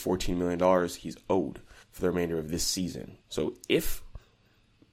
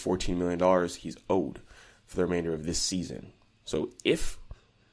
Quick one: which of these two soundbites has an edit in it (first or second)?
first